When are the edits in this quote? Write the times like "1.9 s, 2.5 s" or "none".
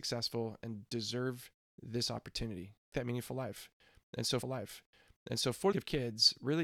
1.7 s, 2.9 s, 4.4 s, 5.7 s